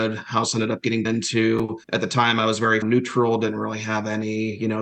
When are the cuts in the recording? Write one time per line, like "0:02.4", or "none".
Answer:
0:01.0
0:01.8
0:02.8

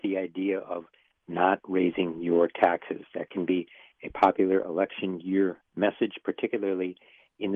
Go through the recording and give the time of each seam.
none

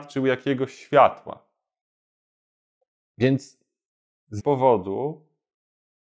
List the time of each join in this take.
0:04.4

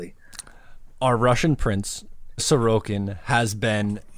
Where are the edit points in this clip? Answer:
0:00.9
0:02.4

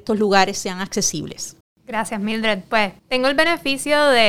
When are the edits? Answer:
0:01.6
0:03.0

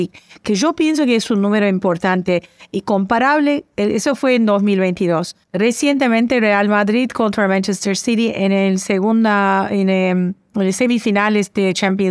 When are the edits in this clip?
0:05.4

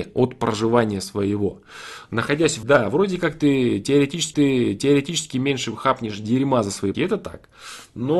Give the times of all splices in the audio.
0:02.6
0:04.3
0:06.9

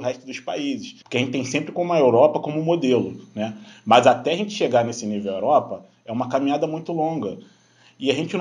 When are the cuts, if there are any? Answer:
0:01.0

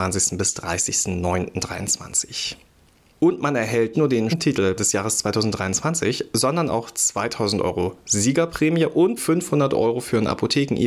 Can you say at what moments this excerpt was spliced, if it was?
0:03.9
0:04.3
0:04.8
0:09.2

